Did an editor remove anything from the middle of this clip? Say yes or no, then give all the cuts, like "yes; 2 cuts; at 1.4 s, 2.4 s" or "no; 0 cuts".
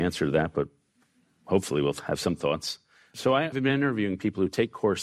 no; 0 cuts